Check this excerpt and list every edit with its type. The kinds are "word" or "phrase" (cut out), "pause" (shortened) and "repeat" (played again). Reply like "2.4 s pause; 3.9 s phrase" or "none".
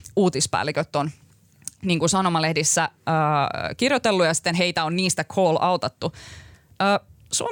none